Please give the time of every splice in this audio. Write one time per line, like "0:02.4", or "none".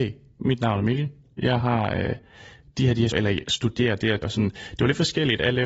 0:03.1
0:03.4
0:04.2

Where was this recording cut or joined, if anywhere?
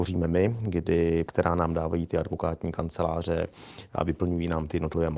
0:01.2

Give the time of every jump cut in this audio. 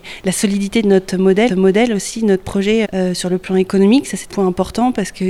0:01.5
0:02.8
0:04.3

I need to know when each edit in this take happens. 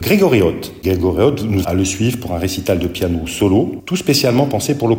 0:01.6

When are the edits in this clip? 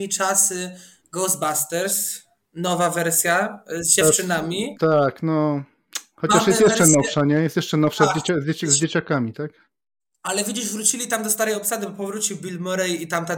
none

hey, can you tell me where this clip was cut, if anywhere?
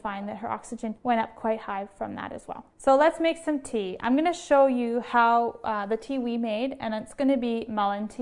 0:01.0
0:02.7

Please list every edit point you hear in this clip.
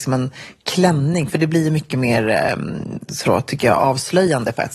none

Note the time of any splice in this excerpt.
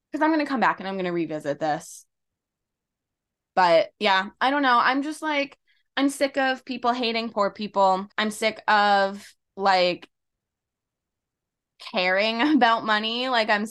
0:03.9
0:08.1
0:09.4

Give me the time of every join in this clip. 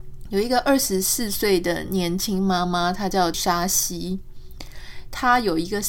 0:03.3

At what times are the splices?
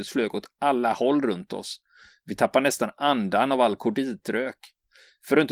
none

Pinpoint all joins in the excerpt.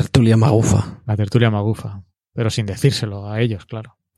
none

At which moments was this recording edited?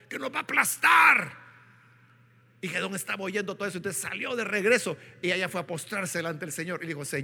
none

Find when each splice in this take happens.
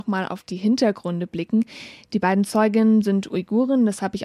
none

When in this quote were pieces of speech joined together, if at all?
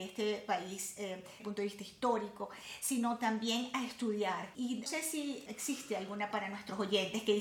0:01.4
0:04.9
0:05.5
0:06.3

